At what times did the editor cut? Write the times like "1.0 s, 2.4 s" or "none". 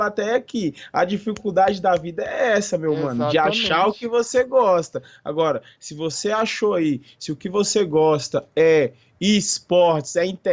none